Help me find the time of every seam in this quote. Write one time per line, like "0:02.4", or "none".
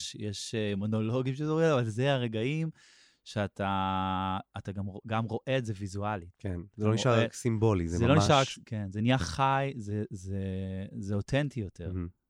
none